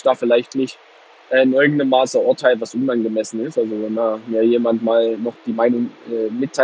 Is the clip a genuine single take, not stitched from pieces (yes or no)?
yes